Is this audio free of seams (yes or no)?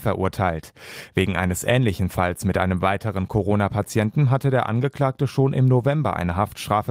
yes